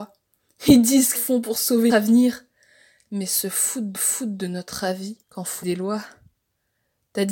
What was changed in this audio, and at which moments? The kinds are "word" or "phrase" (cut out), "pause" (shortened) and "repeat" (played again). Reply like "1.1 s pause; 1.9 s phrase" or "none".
1.1 s phrase; 1.9 s word; 3.9 s repeat; 5.2 s pause; 5.6 s word